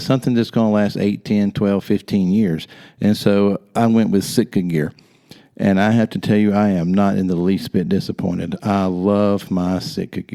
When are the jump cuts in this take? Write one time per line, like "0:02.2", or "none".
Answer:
none